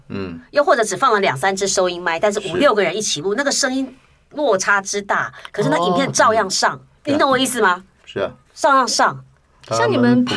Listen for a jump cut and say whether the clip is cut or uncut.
cut